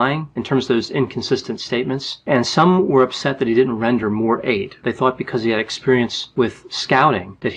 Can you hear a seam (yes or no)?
no